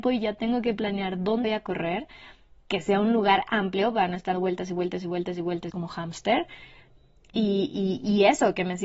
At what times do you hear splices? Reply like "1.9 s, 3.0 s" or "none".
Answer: 1.4 s, 4.3 s, 5.7 s